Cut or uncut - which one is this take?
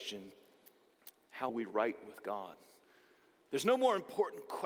cut